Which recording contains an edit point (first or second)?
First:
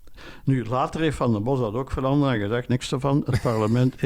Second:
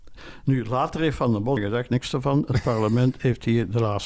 second